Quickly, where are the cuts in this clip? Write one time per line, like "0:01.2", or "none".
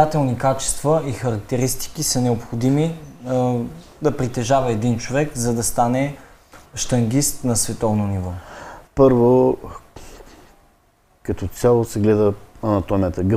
0:06.7
0:08.9

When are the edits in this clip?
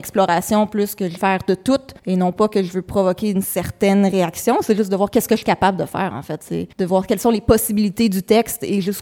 0:01.2
0:02.0
0:06.7

